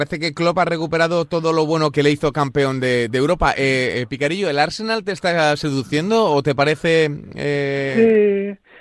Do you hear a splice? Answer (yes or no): yes